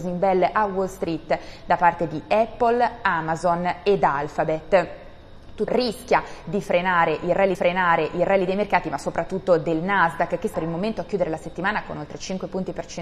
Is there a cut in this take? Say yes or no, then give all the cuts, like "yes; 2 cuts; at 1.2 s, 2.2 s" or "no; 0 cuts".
yes; 3 cuts; at 5.7 s, 7.5 s, 10.5 s